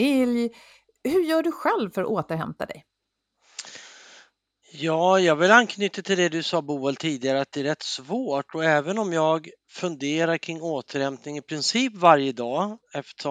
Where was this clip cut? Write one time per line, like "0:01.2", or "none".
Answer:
none